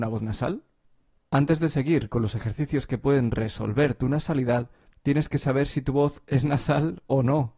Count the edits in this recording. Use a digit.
0